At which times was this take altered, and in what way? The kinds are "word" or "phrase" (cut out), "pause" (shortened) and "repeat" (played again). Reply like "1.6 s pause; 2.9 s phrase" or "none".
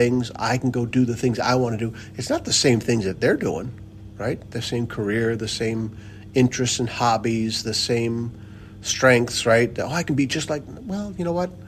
none